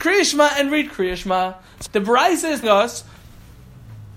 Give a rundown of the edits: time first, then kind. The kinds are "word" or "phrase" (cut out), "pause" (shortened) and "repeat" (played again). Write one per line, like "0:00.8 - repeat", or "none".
0:01.9 - word
0:02.6 - word